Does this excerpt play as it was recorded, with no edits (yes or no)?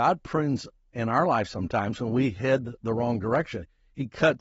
yes